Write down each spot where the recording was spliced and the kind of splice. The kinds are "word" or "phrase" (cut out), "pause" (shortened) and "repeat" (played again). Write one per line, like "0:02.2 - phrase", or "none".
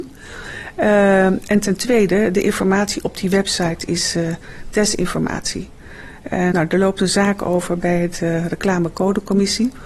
0:06.5 - word